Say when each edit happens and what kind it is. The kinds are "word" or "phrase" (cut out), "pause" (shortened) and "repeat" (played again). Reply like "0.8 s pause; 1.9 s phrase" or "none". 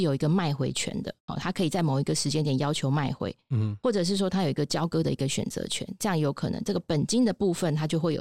1.2 s pause